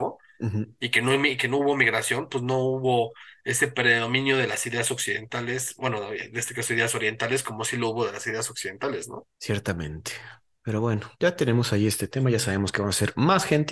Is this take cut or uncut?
cut